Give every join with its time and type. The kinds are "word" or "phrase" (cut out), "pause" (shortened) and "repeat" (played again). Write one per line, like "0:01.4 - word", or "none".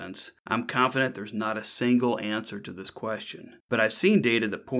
0:03.6 - pause